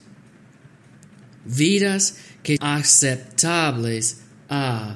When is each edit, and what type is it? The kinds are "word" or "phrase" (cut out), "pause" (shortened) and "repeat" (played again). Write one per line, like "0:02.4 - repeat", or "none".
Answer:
0:02.6 - word